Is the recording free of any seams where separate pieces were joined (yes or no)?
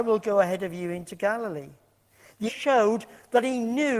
no